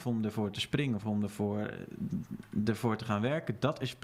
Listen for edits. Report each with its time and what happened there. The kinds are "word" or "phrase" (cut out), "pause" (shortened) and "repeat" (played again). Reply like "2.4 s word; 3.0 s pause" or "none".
none

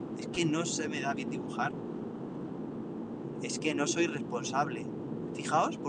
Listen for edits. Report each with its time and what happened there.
3.4 s phrase

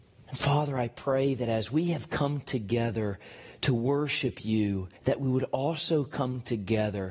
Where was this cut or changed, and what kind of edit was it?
5.0 s pause

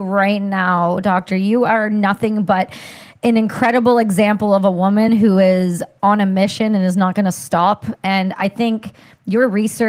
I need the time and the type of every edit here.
none

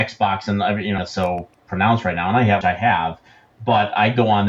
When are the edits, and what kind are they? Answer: 1.0 s word; 2.6 s word

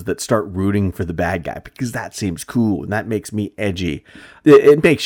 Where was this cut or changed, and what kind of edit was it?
none

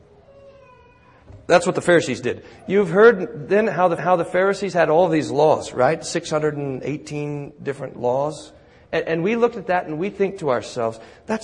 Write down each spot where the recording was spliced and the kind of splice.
4.0 s repeat

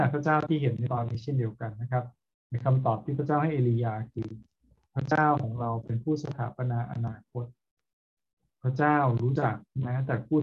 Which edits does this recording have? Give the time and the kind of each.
none

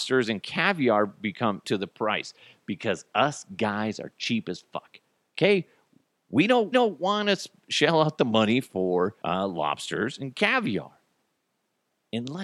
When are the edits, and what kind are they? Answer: 1.6 s phrase; 6.7 s repeat; 9.2 s pause

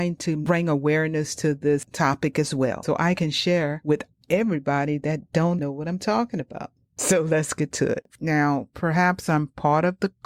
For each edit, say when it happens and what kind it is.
5.6 s word

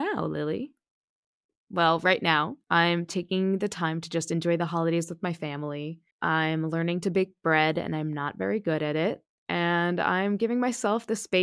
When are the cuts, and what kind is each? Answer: 2.6 s pause; 6.1 s pause

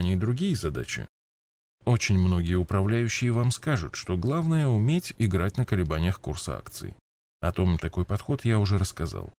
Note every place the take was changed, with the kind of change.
7.8 s phrase

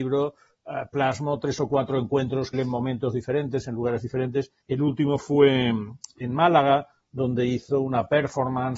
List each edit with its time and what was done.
2.5 s phrase; 4.6 s pause

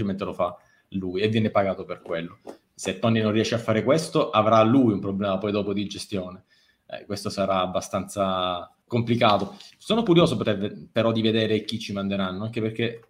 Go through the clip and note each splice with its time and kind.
8.8 s pause; 10.4 s word

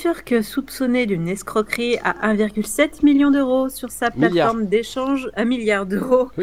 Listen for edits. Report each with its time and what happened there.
none

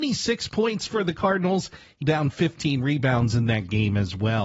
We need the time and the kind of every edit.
2.0 s word

